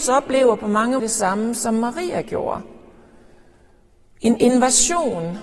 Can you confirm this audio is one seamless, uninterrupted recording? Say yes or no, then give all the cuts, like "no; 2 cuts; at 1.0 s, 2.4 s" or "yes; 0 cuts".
no; 1 cut; at 1.0 s